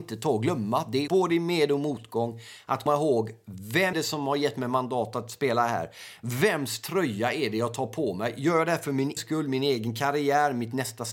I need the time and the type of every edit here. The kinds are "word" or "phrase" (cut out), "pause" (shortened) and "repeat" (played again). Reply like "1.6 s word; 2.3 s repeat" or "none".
1.1 s phrase; 2.9 s word; 3.9 s word; 9.2 s word